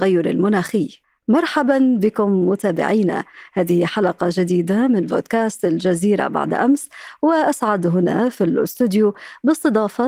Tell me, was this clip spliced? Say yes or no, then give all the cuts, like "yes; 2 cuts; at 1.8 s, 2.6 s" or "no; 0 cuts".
yes; 1 cut; at 1.0 s